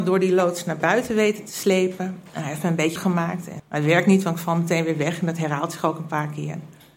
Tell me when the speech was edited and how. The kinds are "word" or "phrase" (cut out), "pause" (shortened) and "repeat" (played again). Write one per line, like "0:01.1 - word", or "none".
0:03.0 - word
0:03.6 - word

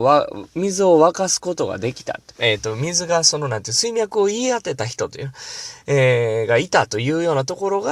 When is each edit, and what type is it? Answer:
0:02.3 - pause

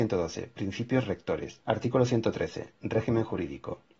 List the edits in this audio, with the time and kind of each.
0:01.6 - pause

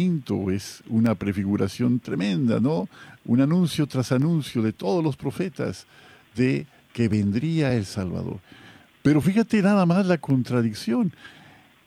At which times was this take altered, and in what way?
none

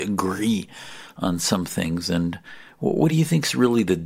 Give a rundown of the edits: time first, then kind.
none

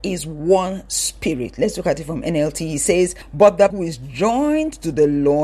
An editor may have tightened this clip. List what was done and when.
0:03.7 - word

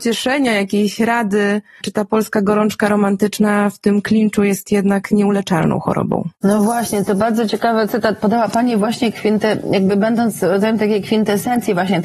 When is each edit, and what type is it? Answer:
none

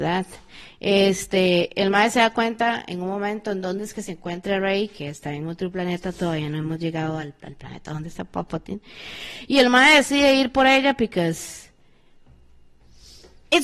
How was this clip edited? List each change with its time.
none

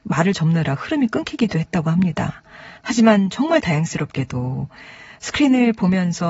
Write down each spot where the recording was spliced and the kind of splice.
0:02.8 - pause
0:05.2 - pause

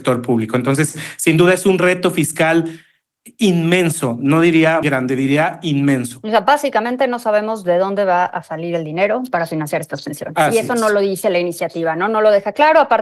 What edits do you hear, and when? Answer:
0:04.8 - word

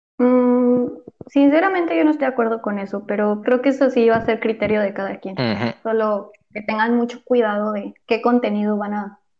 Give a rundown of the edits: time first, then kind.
0:02.2 - word
0:03.4 - word
0:08.0 - pause

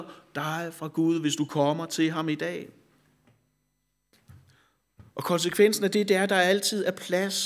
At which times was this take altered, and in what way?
0:05.1 - pause

